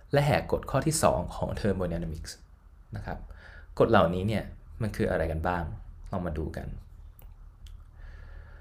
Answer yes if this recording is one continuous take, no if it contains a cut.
yes